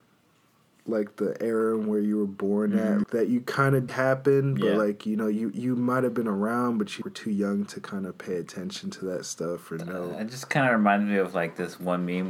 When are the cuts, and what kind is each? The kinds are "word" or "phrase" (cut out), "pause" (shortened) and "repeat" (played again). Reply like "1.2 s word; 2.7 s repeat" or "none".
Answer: 3.0 s word; 3.9 s phrase; 7.0 s word